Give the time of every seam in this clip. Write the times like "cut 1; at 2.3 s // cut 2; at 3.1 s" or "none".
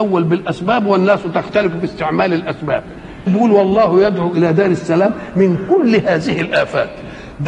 cut 1; at 3.3 s

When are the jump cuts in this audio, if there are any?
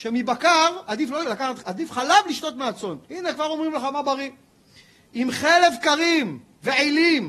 cut 1; at 1.2 s // cut 2; at 1.6 s // cut 3; at 3.0 s

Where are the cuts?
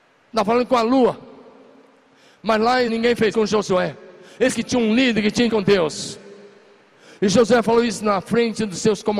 cut 1; at 2.9 s // cut 2; at 3.3 s // cut 3; at 4.5 s // cut 4; at 5.5 s

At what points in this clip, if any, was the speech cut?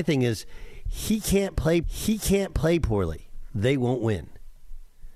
cut 1; at 1.8 s

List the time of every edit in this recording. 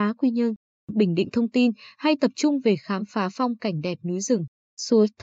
none

